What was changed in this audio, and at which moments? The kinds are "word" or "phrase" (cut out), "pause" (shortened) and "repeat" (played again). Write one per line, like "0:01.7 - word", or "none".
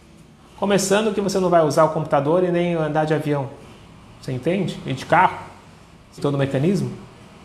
0:06.2 - word